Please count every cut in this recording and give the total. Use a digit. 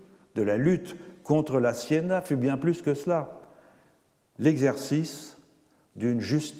0